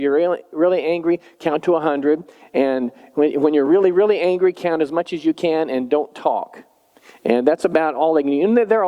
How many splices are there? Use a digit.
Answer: 0